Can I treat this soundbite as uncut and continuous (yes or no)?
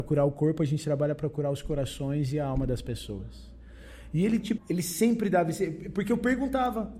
no